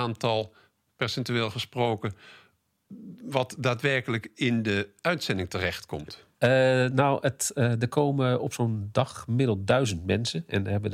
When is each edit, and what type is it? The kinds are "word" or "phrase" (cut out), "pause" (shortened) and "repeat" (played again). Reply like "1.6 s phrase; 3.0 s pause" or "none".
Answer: 6.3 s pause